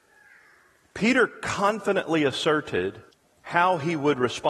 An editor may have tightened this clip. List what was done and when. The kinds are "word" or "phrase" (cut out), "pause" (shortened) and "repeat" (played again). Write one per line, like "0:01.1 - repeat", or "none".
0:03.1 - pause